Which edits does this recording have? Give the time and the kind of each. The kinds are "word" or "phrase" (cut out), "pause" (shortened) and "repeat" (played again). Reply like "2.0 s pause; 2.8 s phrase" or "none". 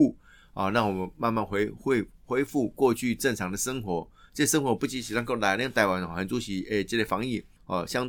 none

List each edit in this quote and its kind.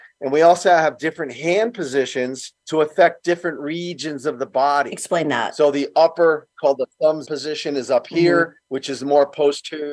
2.6 s pause; 7.2 s word; 8.6 s pause

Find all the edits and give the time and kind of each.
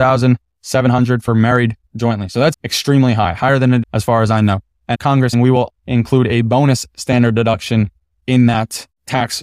1.9 s word; 2.5 s word; 3.8 s phrase; 4.9 s word; 5.3 s phrase; 5.7 s word

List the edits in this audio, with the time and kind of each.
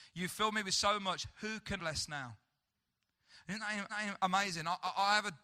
1.8 s word; 3.9 s repeat

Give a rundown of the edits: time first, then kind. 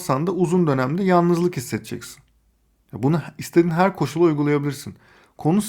none

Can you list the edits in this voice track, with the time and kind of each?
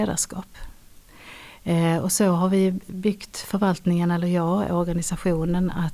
none

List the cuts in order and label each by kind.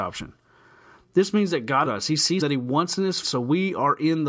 1.9 s word; 2.4 s word; 3.2 s word

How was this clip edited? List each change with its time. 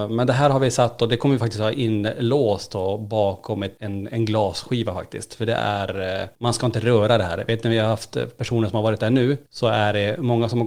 none

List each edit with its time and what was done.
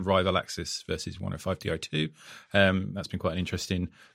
none

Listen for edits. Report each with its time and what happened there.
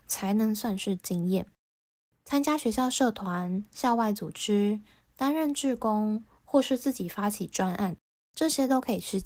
none

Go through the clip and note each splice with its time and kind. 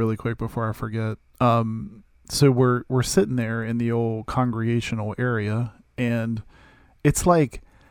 none

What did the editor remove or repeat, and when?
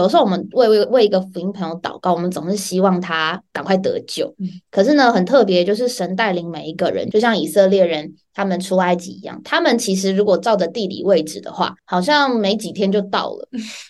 11.8 s pause

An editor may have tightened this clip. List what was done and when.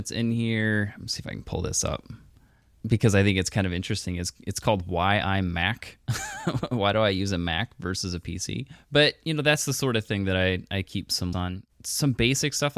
11.3 s word

